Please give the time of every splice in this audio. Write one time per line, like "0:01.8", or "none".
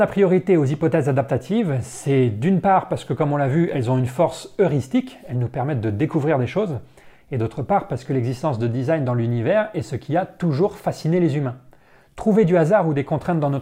none